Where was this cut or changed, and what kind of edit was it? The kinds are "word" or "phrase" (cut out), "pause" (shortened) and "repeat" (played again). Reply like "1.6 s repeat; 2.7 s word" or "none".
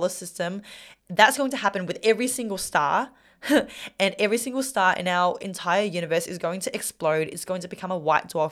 1.0 s pause